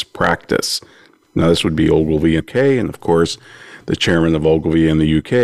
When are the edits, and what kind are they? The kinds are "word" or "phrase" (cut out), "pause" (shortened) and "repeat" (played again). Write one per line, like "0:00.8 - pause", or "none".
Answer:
0:02.4 - word